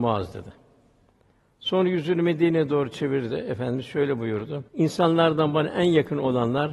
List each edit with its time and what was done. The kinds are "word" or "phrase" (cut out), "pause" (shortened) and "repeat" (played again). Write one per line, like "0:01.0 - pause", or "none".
0:04.7 - pause